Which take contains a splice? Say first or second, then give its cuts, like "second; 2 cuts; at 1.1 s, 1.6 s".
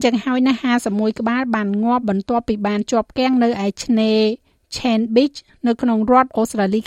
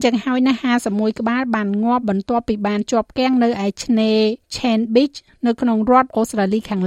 second; 1 cut; at 4.4 s